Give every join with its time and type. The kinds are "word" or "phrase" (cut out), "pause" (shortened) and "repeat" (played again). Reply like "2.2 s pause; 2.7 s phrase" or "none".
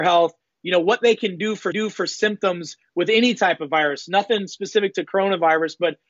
1.7 s repeat